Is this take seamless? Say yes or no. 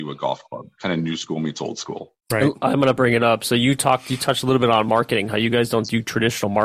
no